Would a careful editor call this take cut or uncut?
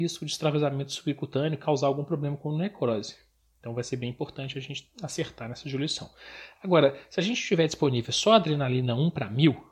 uncut